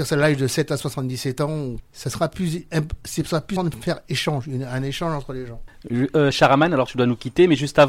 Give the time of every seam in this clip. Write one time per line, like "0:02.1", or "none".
0:01.8
0:03.6